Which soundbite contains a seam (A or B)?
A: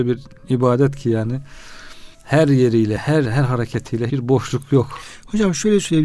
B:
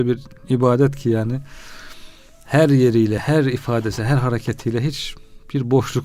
A